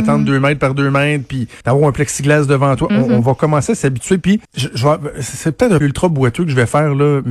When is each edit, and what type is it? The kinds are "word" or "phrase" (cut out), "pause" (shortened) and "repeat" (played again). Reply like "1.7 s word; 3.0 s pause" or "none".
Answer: 1.6 s pause; 4.4 s pause; 5.8 s word